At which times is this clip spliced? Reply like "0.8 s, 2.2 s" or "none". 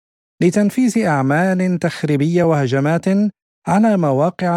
none